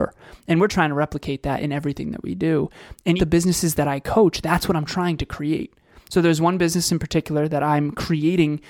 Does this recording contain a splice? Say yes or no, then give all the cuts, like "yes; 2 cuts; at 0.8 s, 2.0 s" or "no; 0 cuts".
yes; 1 cut; at 3.2 s